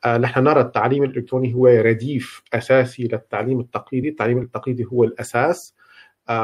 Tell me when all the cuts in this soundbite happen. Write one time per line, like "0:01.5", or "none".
none